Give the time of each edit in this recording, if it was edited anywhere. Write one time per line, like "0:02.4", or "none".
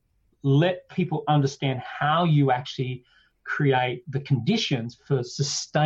none